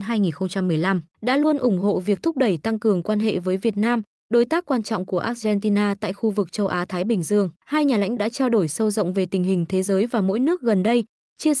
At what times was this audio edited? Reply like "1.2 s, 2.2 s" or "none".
1.1 s, 7.6 s, 8.2 s

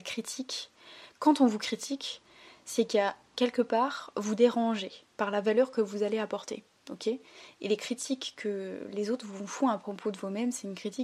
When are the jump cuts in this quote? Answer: 5.1 s

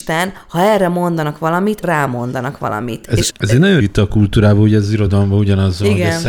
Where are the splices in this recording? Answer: 1.8 s, 3.3 s, 3.8 s

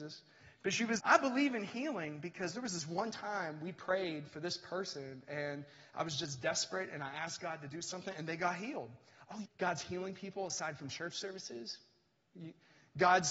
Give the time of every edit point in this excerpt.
1.0 s, 9.4 s

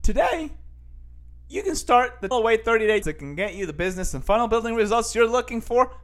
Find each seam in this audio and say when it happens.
2.3 s, 3.0 s

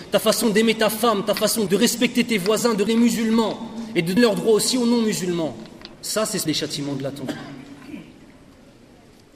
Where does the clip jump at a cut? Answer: 1.7 s, 2.9 s, 4.2 s, 5.9 s, 6.5 s

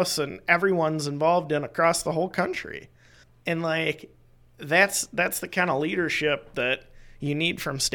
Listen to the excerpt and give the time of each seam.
3.2 s

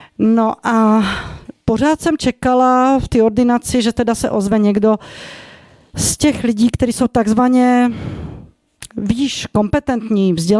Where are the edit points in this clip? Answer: 1.6 s

